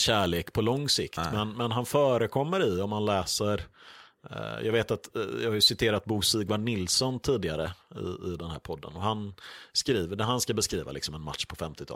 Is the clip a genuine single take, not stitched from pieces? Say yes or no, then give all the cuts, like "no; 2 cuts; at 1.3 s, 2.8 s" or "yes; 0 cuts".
yes; 0 cuts